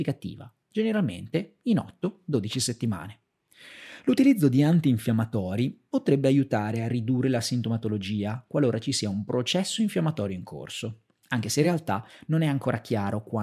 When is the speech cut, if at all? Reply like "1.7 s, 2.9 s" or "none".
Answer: none